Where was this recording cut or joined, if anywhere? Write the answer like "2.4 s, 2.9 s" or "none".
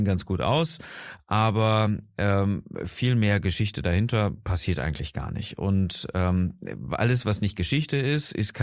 none